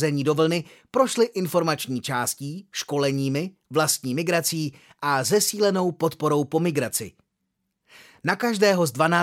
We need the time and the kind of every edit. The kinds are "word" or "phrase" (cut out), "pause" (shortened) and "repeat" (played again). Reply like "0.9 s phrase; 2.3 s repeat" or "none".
none